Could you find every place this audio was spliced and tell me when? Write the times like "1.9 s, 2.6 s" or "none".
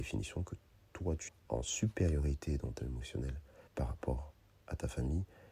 1.3 s, 2.8 s, 3.7 s